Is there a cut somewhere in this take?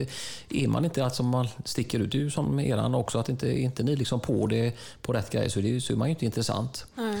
no; 0 cuts

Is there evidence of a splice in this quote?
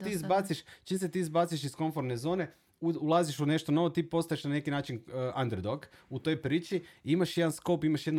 no; 0 cuts

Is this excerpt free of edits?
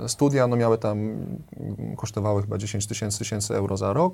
no; 1 cut; at 3.2 s

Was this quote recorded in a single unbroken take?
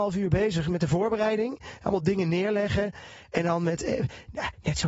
yes; 0 cuts

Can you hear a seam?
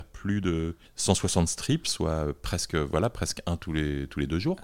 no; 0 cuts

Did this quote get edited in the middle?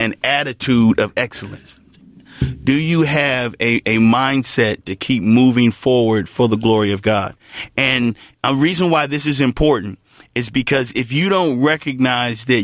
no; 0 cuts

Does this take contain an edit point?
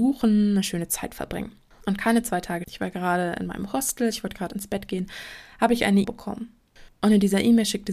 yes; 2 cuts; at 2.6 s, 6.0 s

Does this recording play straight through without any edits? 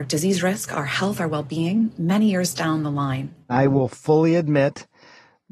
no; 1 cut; at 3.4 s

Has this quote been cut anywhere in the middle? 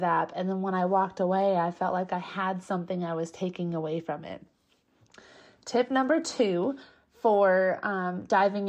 no; 0 cuts

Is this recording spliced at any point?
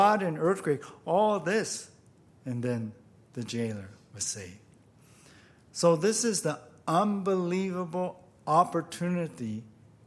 no; 0 cuts

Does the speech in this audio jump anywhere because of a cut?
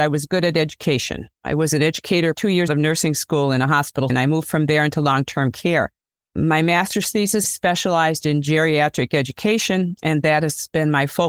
yes; 5 cuts; at 1.4 s, 2.3 s, 2.7 s, 4.1 s, 7.4 s

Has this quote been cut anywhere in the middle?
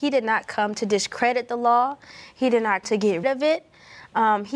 yes; 2 cuts; at 2.8 s, 3.2 s

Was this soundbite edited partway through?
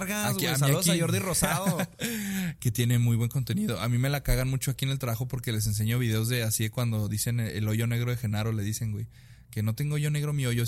no; 0 cuts

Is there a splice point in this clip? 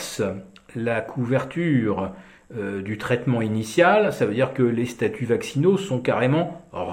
no; 0 cuts

